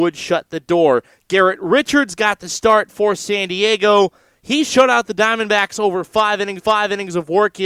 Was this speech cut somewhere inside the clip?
yes; 1 cut; at 6.6 s

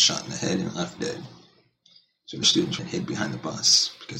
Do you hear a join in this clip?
yes; 3 cuts; at 1.0 s, 2.4 s, 2.8 s

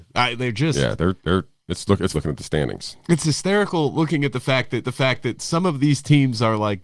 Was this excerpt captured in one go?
no; 3 cuts; at 1.2 s, 2.1 s, 4.8 s

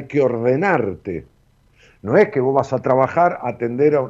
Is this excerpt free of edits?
yes; 0 cuts

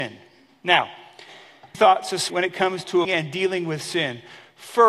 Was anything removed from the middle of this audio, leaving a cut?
yes; 3 cuts; at 1.7 s, 2.3 s, 3.0 s

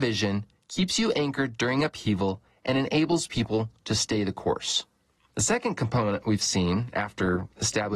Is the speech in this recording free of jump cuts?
yes; 0 cuts

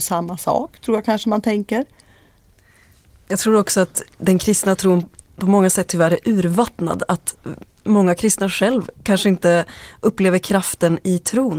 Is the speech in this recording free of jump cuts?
yes; 0 cuts

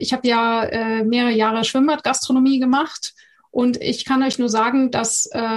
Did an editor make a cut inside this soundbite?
no; 0 cuts

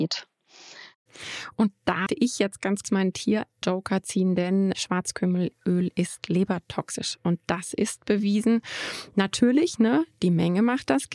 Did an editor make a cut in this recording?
yes; 4 cuts; at 2.1 s, 2.8 s, 3.6 s, 4.7 s

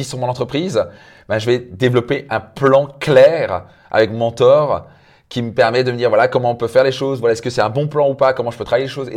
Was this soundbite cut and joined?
no; 0 cuts

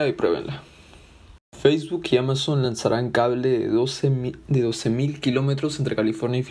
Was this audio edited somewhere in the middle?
no; 0 cuts

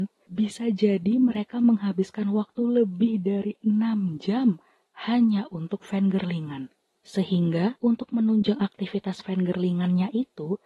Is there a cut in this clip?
no; 0 cuts

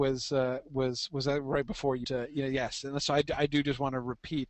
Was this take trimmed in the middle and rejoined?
yes; 1 cut; at 2.0 s

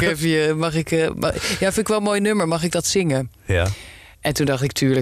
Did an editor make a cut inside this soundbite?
no; 0 cuts

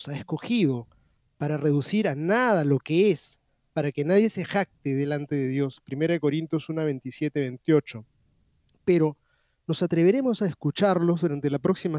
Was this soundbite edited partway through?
no; 0 cuts

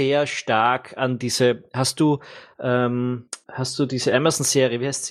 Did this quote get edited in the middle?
no; 0 cuts

